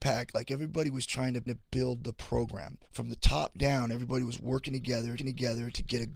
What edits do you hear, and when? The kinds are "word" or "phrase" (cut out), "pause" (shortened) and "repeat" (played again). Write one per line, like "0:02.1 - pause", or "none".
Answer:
0:01.5 - repeat
0:02.9 - pause
0:05.2 - repeat